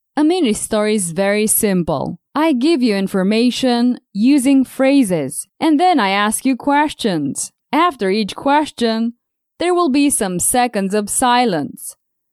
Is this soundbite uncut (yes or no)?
no